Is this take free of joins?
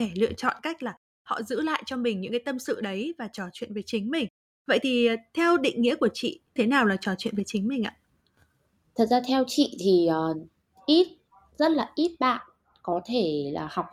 no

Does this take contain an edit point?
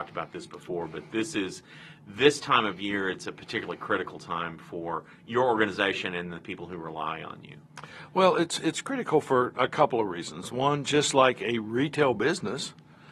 no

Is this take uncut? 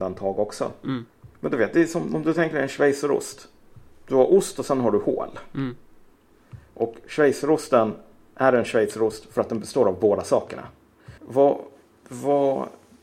no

